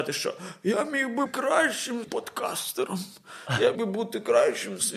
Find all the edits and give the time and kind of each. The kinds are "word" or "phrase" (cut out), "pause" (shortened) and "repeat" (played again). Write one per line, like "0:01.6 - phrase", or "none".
0:01.3 - word
0:02.0 - word
0:03.7 - word

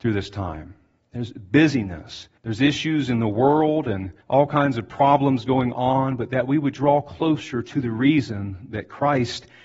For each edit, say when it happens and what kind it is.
0:02.4 - pause
0:04.2 - pause

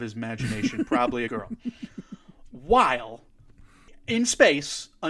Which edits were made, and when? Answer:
0:01.3 - phrase

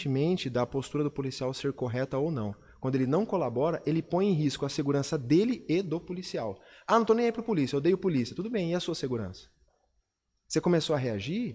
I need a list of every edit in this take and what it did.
none

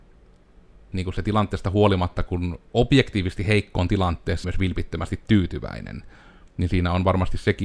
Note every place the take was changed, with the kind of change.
0:00.9 - word
0:02.7 - pause
0:04.4 - phrase

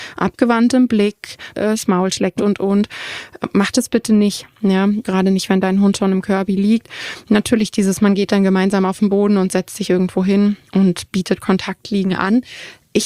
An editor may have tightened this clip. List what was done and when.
0:01.5 - phrase
0:02.4 - word
0:05.0 - word
0:10.7 - pause

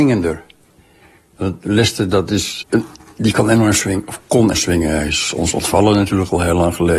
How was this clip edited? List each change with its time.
0:02.6 - word
0:04.5 - word

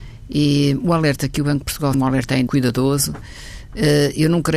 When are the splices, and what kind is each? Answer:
0:01.9 - phrase
0:02.5 - word

